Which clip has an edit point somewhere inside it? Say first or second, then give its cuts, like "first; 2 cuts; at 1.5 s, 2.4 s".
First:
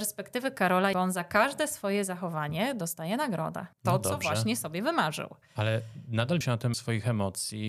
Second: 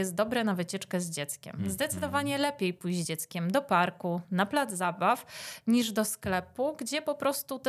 first; 4 cuts; at 0.9 s, 3.7 s, 6.4 s, 6.7 s